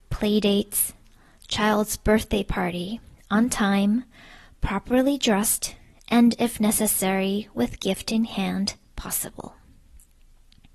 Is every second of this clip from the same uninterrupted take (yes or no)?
yes